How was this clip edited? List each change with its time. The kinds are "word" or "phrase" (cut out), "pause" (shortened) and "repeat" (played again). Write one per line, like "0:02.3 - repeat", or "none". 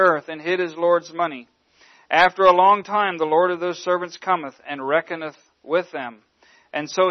none